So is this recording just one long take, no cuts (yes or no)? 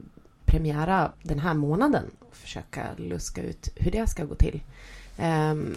no